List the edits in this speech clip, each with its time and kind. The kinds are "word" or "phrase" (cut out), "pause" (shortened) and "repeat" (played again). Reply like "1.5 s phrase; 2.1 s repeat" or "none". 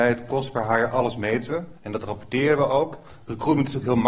1.8 s pause